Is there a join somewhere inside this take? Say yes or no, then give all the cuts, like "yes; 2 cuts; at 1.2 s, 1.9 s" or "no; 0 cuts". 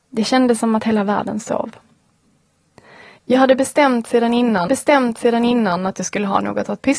yes; 1 cut; at 4.7 s